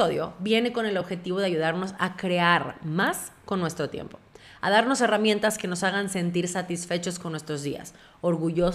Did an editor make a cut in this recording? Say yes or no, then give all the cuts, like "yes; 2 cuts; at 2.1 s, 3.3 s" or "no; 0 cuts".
no; 0 cuts